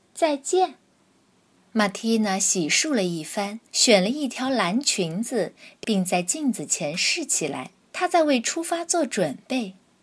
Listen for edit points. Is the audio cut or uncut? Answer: cut